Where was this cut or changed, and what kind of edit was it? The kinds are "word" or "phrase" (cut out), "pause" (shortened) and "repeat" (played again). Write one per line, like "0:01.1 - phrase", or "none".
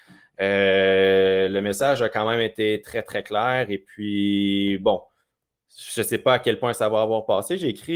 none